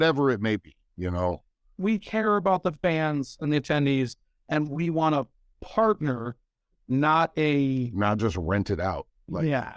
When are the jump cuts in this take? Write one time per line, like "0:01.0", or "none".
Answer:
none